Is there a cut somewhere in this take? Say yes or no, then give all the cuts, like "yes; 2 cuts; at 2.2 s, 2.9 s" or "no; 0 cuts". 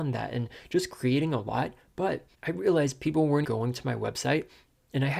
yes; 2 cuts; at 2.3 s, 3.4 s